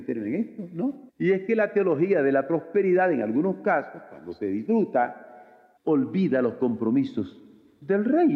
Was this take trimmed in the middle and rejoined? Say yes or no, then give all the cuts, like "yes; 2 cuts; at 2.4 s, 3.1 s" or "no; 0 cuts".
yes; 2 cuts; at 1.1 s, 5.8 s